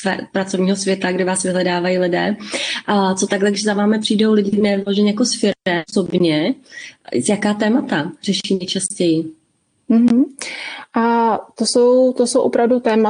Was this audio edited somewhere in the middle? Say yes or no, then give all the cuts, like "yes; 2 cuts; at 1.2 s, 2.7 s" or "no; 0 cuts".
no; 0 cuts